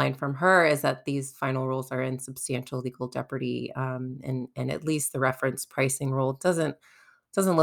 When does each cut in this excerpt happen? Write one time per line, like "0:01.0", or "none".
none